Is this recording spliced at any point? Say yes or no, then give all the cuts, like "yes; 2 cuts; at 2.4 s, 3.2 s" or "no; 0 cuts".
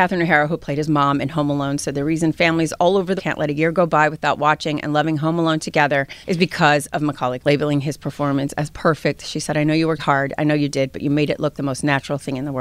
yes; 5 cuts; at 3.2 s, 6.2 s, 7.4 s, 10.0 s, 11.5 s